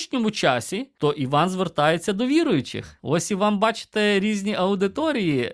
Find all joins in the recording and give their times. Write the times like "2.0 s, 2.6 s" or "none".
3.0 s